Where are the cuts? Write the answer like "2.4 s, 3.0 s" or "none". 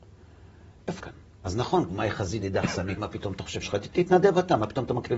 1.0 s, 1.9 s, 2.4 s, 3.0 s, 3.6 s